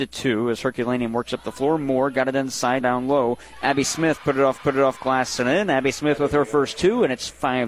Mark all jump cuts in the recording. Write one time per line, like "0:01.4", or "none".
0:02.8
0:04.6